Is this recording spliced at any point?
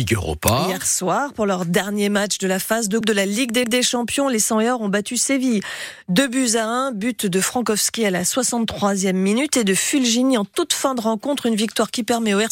yes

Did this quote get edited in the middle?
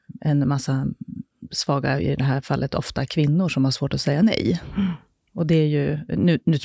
no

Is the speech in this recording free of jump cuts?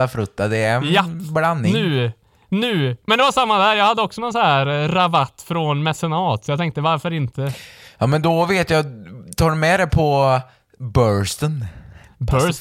yes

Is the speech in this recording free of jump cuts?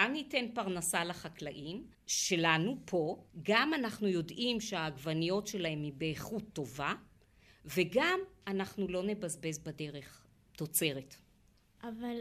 no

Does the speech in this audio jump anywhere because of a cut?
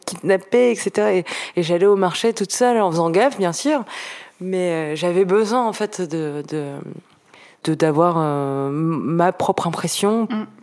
no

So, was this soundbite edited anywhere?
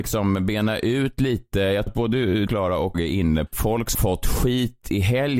yes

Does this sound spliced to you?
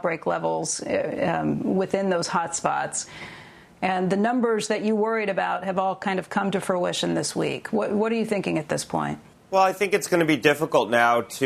no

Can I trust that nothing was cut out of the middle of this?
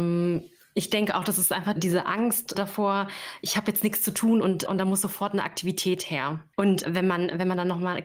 no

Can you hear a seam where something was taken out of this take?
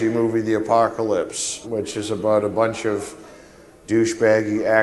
yes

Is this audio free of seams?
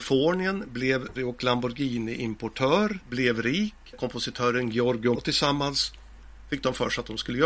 no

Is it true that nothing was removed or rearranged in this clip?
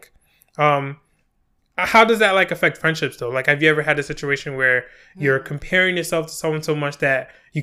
yes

